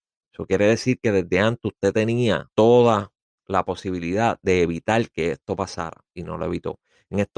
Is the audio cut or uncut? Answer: cut